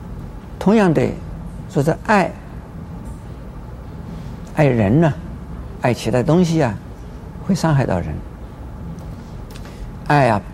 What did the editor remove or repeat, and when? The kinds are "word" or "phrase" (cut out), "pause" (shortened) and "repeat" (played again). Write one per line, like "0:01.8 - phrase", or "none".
none